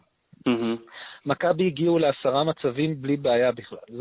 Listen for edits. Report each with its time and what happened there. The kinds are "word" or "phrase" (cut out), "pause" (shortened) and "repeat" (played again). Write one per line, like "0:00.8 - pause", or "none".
none